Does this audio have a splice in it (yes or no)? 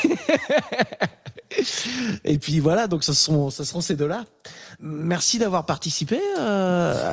no